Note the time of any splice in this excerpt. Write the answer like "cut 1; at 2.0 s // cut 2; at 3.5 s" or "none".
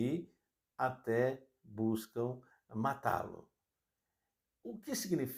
cut 1; at 2.5 s